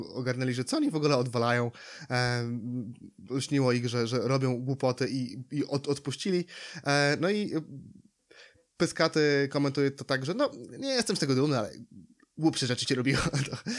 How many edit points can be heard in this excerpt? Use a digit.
0